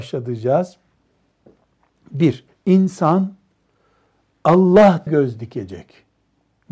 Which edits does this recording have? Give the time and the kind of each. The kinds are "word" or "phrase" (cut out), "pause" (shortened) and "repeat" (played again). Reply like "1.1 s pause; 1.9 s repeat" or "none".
2.5 s pause; 5.1 s word